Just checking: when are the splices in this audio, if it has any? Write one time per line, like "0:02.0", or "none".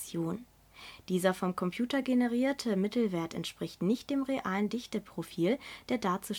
none